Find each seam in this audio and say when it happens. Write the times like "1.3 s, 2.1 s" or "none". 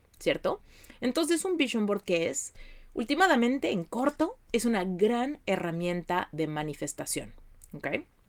none